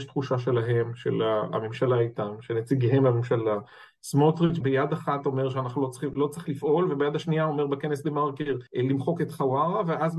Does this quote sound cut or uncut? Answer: cut